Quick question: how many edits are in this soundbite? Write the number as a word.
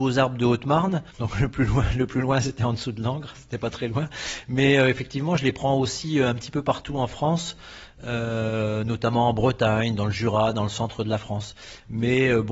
one